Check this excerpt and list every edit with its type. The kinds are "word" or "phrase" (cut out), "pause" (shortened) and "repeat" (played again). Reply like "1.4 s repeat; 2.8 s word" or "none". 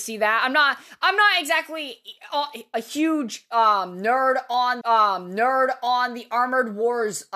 4.8 s repeat